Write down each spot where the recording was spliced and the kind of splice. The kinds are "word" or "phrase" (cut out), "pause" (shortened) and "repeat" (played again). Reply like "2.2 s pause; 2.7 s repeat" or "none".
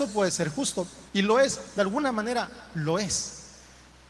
1.1 s pause